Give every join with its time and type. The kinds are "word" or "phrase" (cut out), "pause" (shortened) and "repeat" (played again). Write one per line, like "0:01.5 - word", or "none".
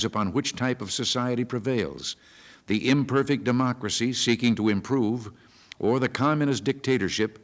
none